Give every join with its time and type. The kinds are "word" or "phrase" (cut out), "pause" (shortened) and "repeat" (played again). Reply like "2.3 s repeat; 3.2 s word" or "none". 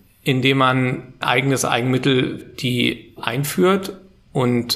1.2 s word; 2.4 s word; 3.2 s word